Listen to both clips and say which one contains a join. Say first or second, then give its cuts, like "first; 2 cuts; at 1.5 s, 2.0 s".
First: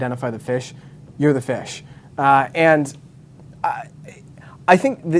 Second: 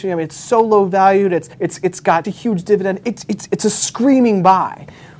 second; 3 cuts; at 1.5 s, 2.2 s, 3.5 s